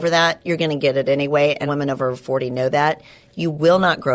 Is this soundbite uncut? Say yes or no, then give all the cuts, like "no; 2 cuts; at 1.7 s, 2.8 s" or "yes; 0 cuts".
no; 1 cut; at 1.7 s